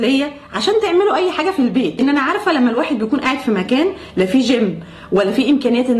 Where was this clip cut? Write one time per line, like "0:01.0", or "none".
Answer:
none